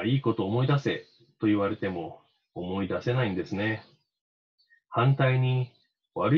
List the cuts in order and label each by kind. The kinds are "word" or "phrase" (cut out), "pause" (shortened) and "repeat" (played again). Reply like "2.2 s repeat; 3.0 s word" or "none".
none

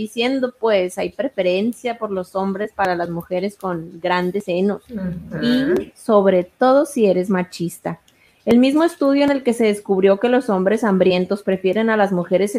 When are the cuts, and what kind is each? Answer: none

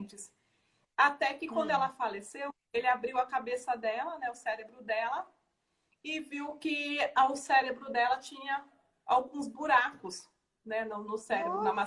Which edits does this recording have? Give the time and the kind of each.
none

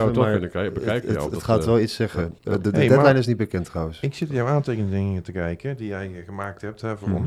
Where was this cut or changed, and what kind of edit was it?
2.4 s pause

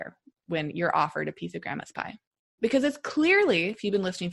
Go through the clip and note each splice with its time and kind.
none

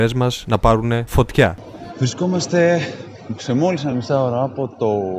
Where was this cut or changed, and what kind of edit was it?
none

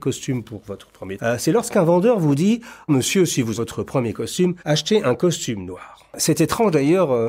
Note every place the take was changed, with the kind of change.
1.2 s phrase; 2.9 s word; 3.6 s word; 4.6 s pause

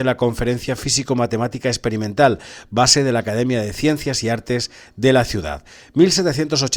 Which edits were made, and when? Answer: none

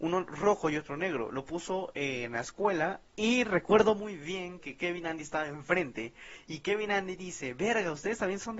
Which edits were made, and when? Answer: 3.1 s pause

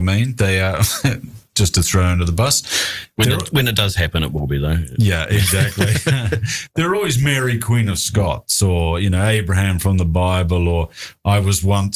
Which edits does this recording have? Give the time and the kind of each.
none

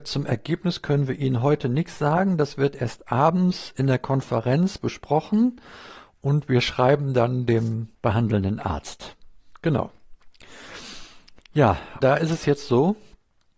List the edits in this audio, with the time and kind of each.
7.9 s pause; 12.0 s word

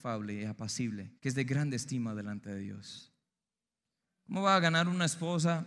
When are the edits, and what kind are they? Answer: 1.2 s pause

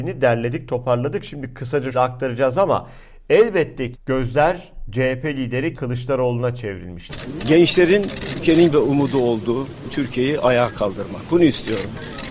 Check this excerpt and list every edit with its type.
1.9 s word; 3.9 s word; 5.8 s word; 8.4 s word; 8.7 s word; 9.9 s word

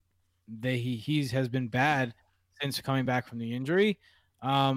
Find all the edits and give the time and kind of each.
none

